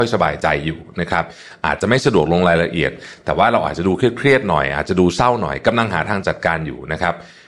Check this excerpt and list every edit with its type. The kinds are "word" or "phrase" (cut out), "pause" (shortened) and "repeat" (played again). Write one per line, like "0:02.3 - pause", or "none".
none